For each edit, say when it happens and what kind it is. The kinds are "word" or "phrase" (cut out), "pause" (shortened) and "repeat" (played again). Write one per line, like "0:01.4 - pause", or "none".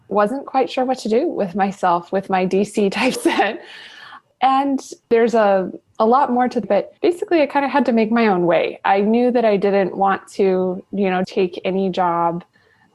0:03.2 - word
0:05.0 - pause
0:06.6 - word
0:07.0 - pause
0:11.2 - word